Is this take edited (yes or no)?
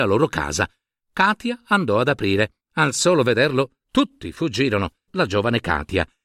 yes